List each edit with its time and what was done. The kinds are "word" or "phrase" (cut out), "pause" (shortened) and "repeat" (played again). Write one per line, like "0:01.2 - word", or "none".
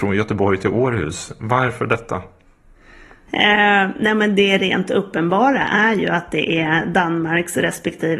none